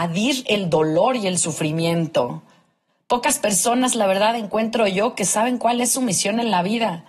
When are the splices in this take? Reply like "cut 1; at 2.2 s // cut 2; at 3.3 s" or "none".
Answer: none